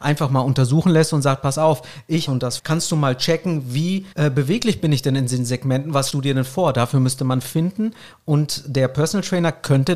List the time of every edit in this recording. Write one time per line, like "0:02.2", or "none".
0:02.3
0:02.6
0:04.1
0:06.1
0:07.4

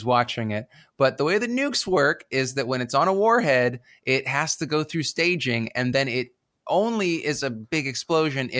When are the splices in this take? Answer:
none

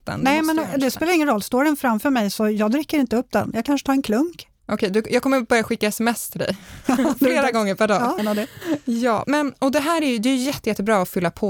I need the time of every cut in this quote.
0:08.2
0:09.2

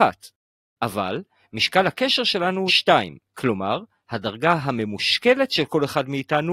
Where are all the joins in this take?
0:02.7
0:03.3

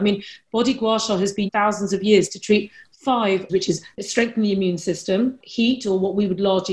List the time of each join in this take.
0:01.5
0:03.5
0:03.9

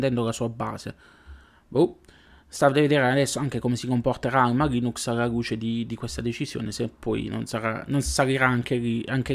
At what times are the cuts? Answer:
none

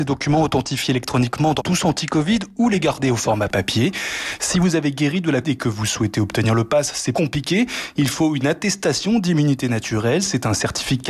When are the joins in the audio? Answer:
0:01.6
0:05.4
0:07.1

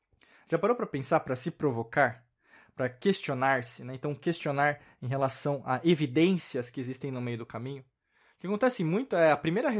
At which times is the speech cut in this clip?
none

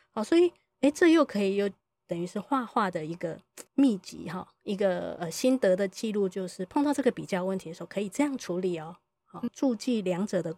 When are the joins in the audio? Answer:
0:03.7
0:09.5

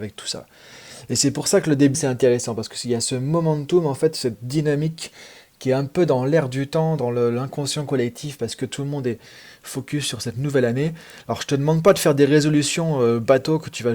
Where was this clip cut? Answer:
0:01.9

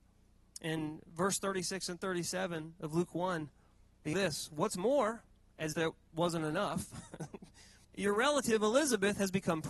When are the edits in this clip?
0:04.1
0:05.7
0:07.8

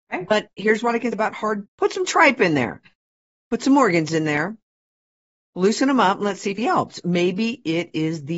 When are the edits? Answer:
0:01.1
0:01.7
0:06.6

